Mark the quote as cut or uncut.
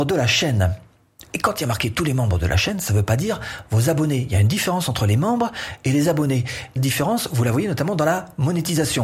cut